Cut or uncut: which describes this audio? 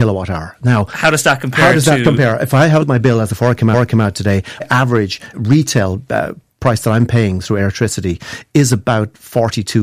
cut